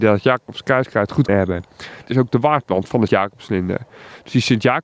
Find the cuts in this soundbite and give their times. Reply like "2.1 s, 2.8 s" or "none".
1.3 s, 2.1 s, 3.1 s